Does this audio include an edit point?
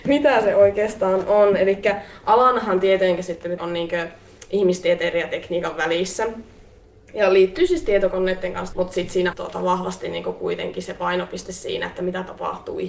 yes; 3 cuts; at 3.6 s, 8.7 s, 9.3 s

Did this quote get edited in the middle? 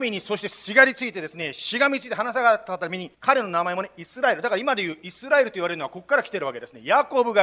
yes; 1 cut; at 3.1 s

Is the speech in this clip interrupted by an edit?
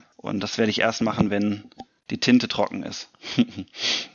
no; 0 cuts

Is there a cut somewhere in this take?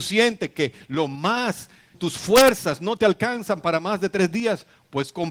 yes; 1 cut; at 1.9 s

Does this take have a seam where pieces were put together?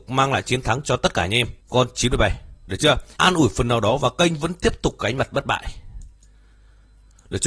yes; 2 cuts; at 1.6 s, 3.2 s

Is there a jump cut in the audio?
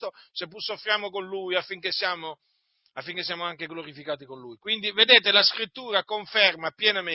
no; 0 cuts

